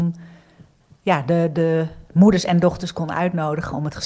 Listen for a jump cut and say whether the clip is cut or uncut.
uncut